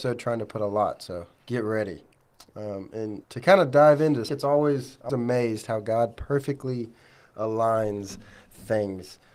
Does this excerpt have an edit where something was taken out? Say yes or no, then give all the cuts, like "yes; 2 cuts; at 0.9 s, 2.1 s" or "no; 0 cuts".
yes; 3 cuts; at 3.2 s, 4.3 s, 5.1 s